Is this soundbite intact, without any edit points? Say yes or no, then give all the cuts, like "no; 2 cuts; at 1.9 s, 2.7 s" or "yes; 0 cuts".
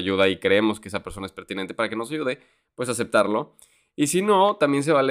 yes; 0 cuts